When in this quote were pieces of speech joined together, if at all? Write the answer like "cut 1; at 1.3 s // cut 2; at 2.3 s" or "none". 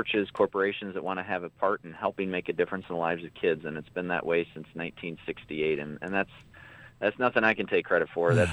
none